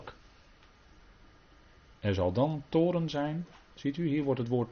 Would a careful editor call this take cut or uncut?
uncut